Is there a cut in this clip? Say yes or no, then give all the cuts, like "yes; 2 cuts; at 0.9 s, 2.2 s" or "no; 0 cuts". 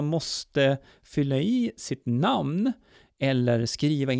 no; 0 cuts